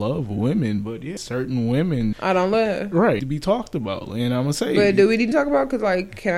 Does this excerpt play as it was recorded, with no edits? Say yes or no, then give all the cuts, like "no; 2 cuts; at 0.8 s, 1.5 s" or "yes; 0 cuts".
no; 4 cuts; at 1.2 s, 2.1 s, 3.2 s, 5.3 s